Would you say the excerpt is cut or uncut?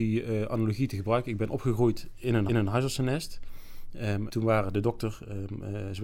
cut